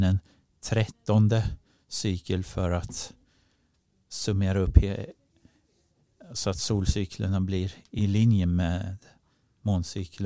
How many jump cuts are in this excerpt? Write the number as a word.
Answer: zero